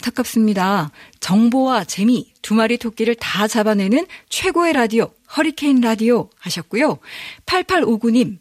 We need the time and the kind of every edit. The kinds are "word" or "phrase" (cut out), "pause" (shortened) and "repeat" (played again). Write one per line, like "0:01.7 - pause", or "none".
none